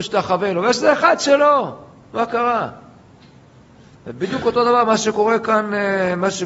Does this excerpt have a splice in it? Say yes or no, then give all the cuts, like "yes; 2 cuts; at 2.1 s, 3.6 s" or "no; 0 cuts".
no; 0 cuts